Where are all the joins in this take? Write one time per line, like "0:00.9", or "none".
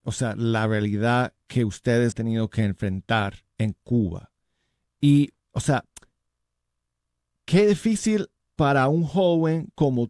0:02.1
0:03.5
0:05.4
0:08.4